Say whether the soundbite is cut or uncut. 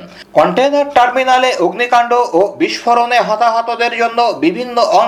uncut